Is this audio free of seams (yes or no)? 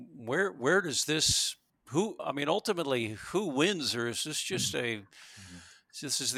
no